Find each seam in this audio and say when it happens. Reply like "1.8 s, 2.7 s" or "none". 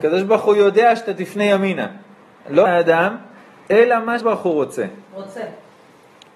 2.6 s, 4.2 s